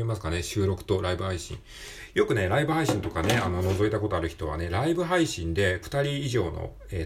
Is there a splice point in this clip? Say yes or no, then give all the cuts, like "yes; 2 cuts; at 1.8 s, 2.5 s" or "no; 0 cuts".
yes; 1 cut; at 5.8 s